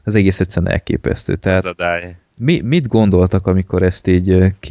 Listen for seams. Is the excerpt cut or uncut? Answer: uncut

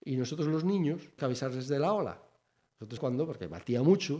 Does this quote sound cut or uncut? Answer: cut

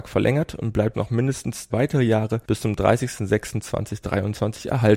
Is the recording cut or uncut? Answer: cut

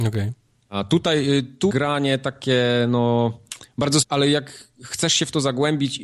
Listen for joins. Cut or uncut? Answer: cut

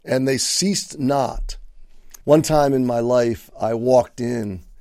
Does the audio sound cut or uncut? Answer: cut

